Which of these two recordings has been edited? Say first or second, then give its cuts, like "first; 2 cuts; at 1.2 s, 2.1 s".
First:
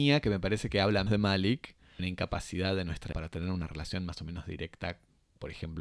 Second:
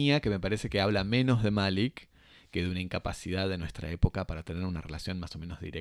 first; 3 cuts; at 1.1 s, 2.0 s, 3.1 s